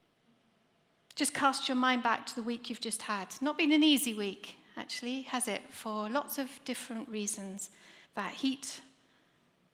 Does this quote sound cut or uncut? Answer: cut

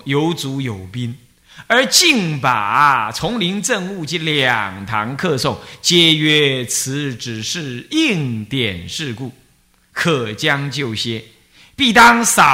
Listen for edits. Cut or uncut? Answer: uncut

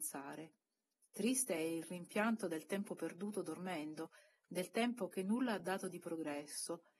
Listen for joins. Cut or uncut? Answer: uncut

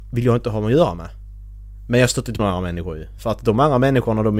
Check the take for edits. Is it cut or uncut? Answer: cut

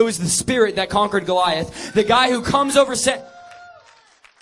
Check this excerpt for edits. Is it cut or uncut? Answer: uncut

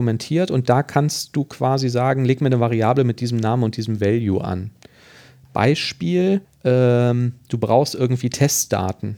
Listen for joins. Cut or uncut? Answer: cut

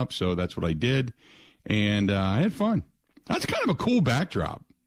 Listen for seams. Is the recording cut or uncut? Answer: uncut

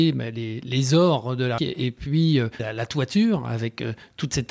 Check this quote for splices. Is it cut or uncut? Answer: cut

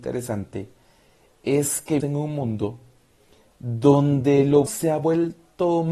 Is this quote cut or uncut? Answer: cut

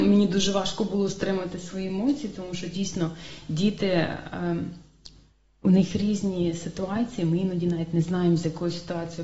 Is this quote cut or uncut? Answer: uncut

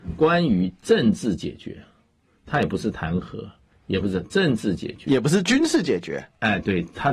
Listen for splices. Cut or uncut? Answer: uncut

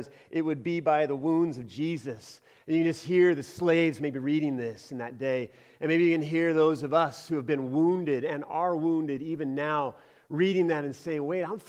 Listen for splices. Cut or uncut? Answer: uncut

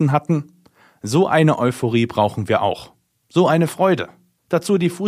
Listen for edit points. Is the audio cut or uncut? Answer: uncut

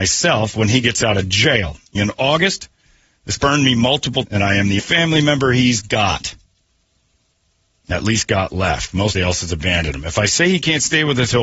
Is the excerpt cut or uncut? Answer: cut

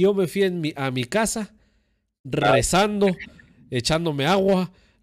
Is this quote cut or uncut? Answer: uncut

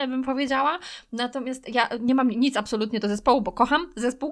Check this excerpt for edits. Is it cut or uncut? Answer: uncut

